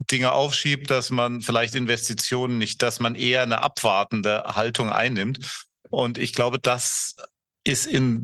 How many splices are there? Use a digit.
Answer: 1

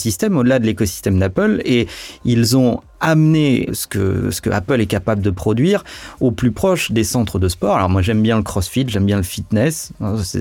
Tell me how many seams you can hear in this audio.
1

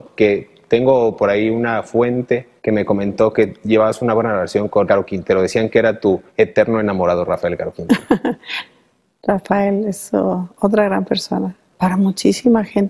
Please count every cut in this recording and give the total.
3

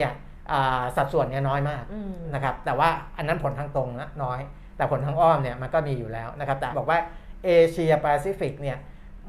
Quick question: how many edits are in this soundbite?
1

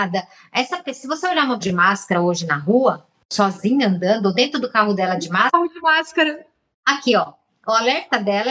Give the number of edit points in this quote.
1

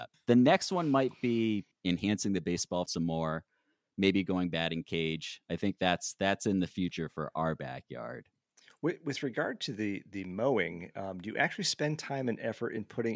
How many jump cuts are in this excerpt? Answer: 1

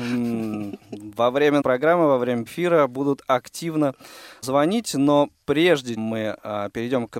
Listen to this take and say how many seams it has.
4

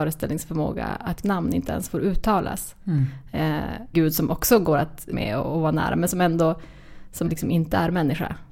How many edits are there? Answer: 4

